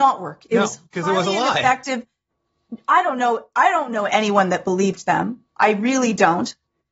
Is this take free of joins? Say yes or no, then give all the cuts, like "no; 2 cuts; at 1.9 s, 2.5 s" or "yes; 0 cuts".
yes; 0 cuts